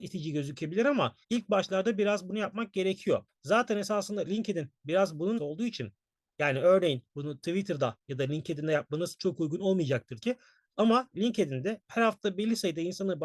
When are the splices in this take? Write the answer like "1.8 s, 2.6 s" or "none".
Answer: 1.2 s, 3.3 s, 5.4 s, 10.2 s